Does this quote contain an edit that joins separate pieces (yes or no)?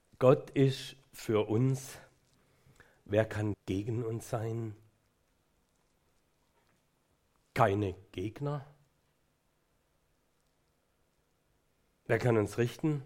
yes